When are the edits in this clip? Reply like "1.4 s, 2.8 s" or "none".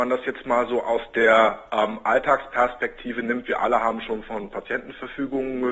none